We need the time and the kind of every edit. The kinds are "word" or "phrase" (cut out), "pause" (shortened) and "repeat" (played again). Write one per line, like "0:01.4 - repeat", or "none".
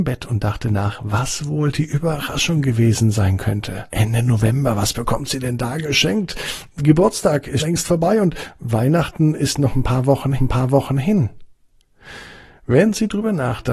0:03.9 - pause
0:07.6 - word
0:10.4 - repeat